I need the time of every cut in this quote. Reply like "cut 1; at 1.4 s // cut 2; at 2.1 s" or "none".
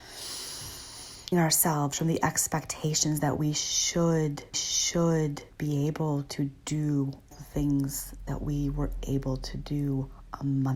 cut 1; at 1.3 s // cut 2; at 4.5 s // cut 3; at 7.3 s